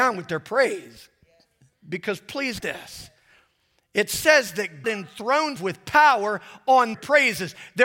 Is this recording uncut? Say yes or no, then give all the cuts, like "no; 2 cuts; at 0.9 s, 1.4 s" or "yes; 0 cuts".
no; 4 cuts; at 2.6 s, 4.8 s, 5.6 s, 6.9 s